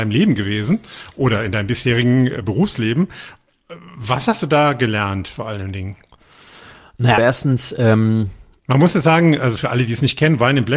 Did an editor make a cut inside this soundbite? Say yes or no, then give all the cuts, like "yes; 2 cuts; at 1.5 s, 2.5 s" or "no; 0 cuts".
yes; 1 cut; at 7.2 s